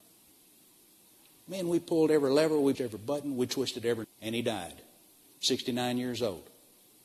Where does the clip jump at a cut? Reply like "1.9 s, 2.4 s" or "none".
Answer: 2.7 s, 4.0 s